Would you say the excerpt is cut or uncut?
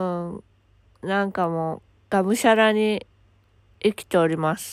uncut